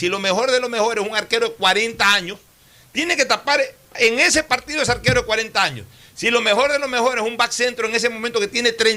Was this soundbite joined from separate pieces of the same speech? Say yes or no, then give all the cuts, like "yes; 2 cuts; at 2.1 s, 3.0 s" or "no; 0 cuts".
no; 0 cuts